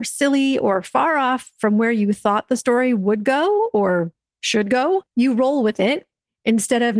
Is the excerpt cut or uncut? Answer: cut